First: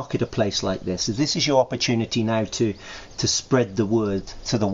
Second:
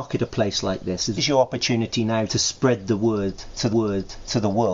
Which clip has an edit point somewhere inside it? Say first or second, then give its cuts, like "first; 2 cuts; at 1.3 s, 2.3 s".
second; 3 cuts; at 1.2 s, 2.3 s, 3.7 s